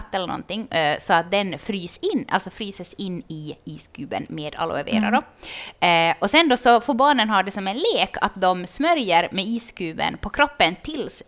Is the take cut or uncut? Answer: uncut